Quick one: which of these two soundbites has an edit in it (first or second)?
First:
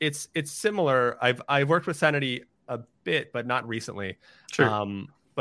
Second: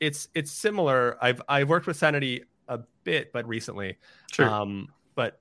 second